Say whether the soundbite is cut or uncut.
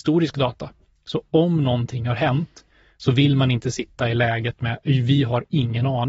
uncut